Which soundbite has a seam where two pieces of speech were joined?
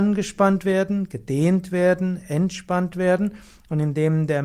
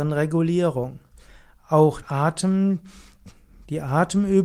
second; 1 cut; at 2.0 s

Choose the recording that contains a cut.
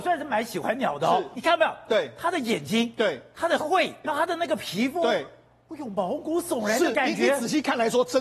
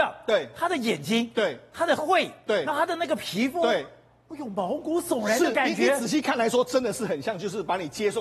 first; 1 cut; at 4.0 s

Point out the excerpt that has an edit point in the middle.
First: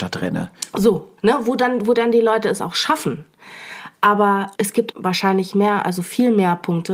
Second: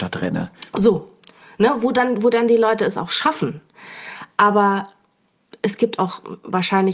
first; 3 cuts; at 1.2 s, 4.6 s, 4.9 s

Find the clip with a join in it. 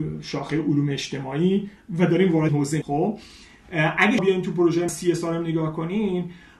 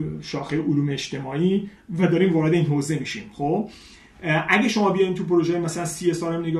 first; 4 cuts; at 2.5 s, 2.8 s, 4.2 s, 4.9 s

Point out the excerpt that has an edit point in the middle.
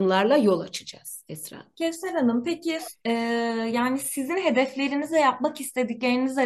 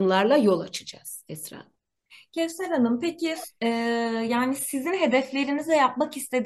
first; 1 cut; at 1.7 s

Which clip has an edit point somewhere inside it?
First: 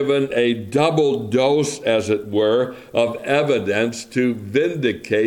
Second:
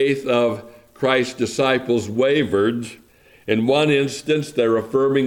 second; 1 cut; at 3.1 s

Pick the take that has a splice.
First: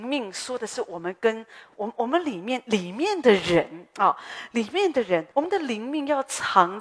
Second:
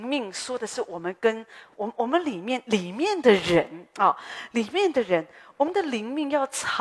first; 1 cut; at 5.3 s

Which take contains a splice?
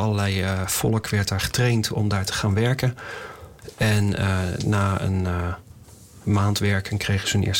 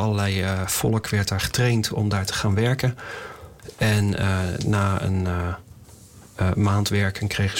first; 1 cut; at 6.2 s

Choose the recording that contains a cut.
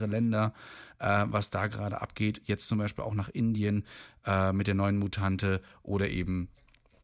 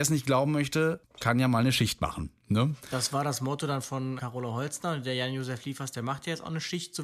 second; 1 cut; at 4.2 s

